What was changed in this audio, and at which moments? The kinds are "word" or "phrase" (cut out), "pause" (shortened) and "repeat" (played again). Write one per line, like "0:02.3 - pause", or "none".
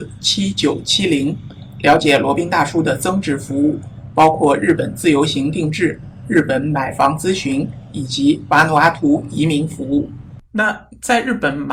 0:10.5 - pause